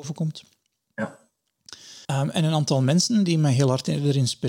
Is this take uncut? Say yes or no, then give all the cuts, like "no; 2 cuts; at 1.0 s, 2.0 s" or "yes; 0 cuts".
no; 1 cut; at 2.0 s